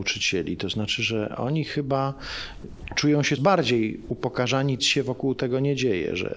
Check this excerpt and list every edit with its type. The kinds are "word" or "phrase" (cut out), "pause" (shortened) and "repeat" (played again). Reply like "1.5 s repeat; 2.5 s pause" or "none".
3.4 s word; 4.8 s phrase

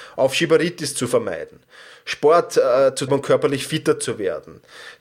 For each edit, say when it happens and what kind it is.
3.1 s word

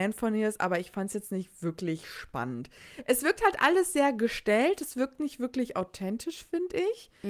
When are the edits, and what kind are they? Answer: none

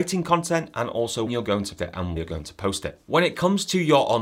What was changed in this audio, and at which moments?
1.3 s word; 1.8 s word; 2.2 s word

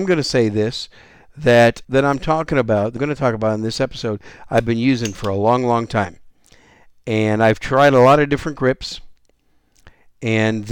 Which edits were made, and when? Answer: 1.8 s phrase; 3.0 s word

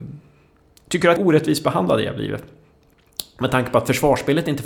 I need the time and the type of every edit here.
1.2 s phrase

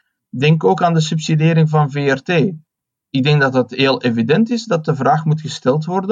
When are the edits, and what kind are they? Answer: none

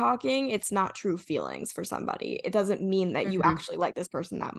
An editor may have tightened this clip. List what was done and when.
none

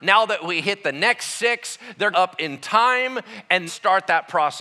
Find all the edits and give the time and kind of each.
2.1 s phrase; 3.7 s word

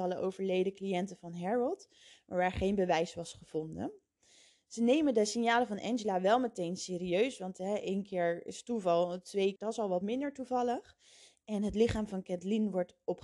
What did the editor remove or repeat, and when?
9.6 s word

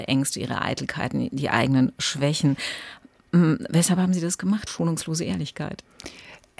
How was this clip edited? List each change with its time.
4.7 s word

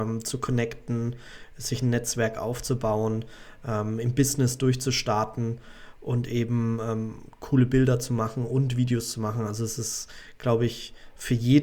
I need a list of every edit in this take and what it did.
none

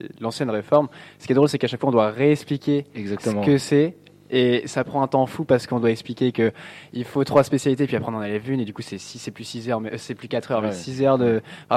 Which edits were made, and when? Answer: none

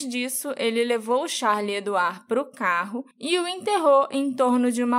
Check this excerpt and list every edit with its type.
3.1 s pause

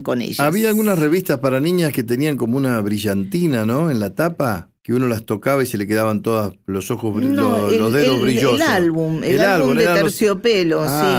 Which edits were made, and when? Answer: 4.8 s pause

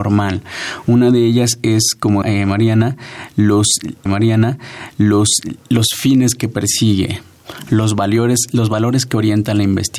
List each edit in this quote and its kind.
2.2 s word; 4.1 s repeat

